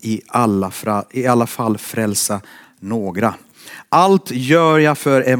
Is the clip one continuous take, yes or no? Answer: yes